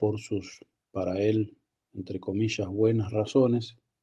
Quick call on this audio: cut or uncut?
uncut